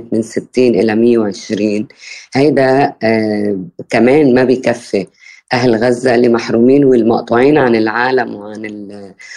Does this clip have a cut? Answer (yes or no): no